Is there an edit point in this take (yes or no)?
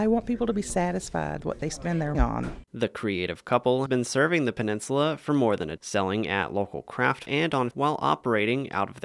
yes